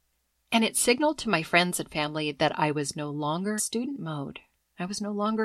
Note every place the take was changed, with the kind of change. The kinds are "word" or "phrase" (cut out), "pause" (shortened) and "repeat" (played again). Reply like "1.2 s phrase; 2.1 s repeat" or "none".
3.6 s word